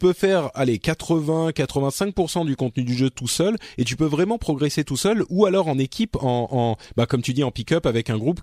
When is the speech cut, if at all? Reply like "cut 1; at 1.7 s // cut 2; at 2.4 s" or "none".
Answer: none

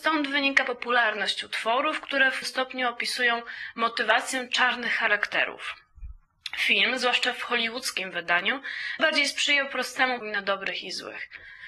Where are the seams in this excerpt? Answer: cut 1; at 2.4 s // cut 2; at 9.0 s // cut 3; at 10.2 s

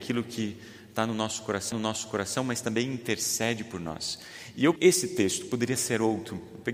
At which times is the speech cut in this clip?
cut 1; at 1.7 s // cut 2; at 4.8 s

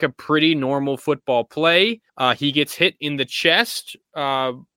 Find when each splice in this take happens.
cut 1; at 2.1 s

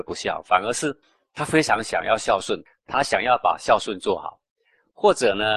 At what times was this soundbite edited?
none

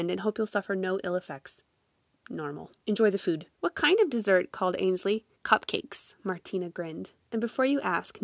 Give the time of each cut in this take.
cut 1; at 2.8 s // cut 2; at 3.5 s // cut 3; at 5.3 s

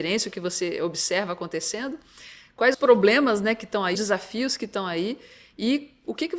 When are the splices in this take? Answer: cut 1; at 2.7 s // cut 2; at 3.9 s

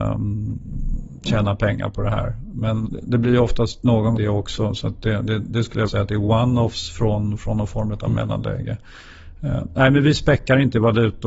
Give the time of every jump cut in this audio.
cut 1; at 2.8 s // cut 2; at 4.2 s // cut 3; at 5.9 s

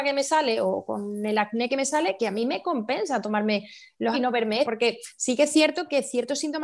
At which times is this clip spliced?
cut 1; at 2.2 s // cut 2; at 4.1 s // cut 3; at 4.6 s

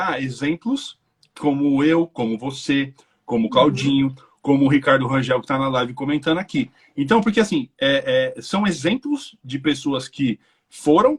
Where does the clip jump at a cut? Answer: none

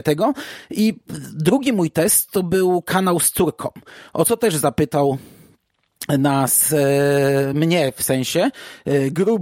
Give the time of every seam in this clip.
none

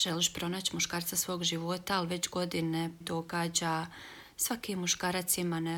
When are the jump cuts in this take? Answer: cut 1; at 3.0 s

